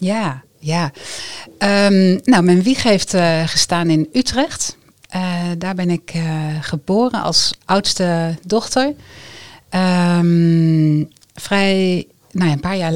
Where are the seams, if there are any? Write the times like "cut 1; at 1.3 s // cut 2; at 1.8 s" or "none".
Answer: none